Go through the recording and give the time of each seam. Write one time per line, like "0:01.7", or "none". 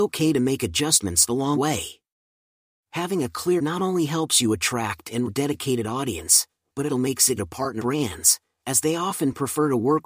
0:01.5
0:03.6
0:05.3
0:06.9
0:07.4
0:07.8